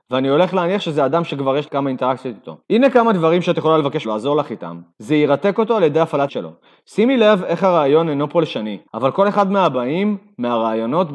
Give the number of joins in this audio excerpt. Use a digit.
6